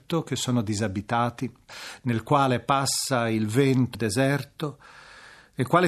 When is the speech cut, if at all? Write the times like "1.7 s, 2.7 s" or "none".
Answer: 3.9 s